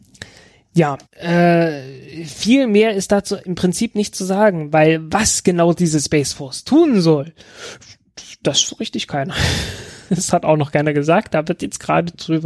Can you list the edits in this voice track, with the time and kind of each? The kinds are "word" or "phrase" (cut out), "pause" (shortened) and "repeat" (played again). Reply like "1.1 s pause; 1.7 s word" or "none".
1.1 s pause; 8.7 s word